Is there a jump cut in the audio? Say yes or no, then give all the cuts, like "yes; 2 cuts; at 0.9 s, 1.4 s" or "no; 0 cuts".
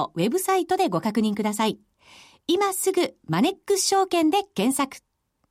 no; 0 cuts